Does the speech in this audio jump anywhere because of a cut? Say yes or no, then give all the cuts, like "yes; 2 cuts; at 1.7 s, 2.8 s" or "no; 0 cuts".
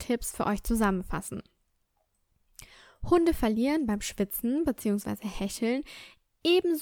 no; 0 cuts